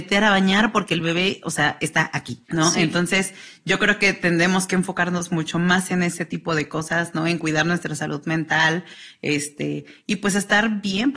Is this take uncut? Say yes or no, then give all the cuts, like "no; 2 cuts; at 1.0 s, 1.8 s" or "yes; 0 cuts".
no; 1 cut; at 2.5 s